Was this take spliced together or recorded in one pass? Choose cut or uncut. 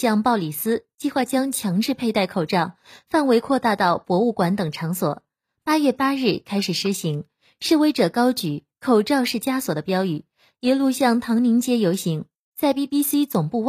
uncut